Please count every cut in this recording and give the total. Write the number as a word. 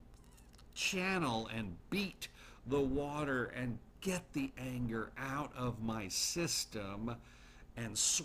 zero